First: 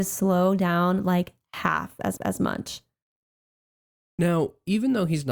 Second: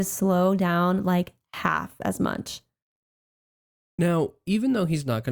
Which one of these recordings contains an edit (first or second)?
first